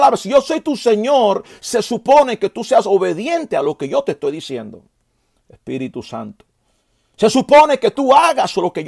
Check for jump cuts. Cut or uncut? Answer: uncut